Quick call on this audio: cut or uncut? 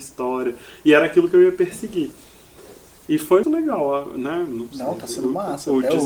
cut